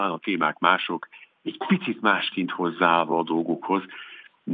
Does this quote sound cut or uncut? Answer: uncut